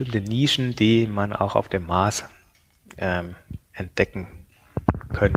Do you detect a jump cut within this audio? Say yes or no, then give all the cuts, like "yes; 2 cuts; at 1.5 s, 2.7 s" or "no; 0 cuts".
yes; 1 cut; at 3.6 s